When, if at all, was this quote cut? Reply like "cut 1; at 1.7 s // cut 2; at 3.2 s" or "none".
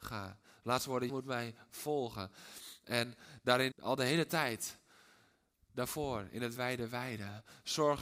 cut 1; at 1.1 s // cut 2; at 3.7 s // cut 3; at 6.6 s